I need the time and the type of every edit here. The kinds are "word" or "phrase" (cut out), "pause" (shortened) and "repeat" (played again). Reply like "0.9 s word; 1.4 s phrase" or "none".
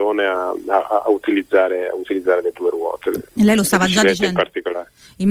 3.3 s pause